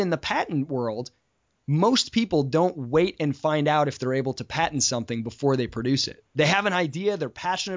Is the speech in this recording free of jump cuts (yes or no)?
yes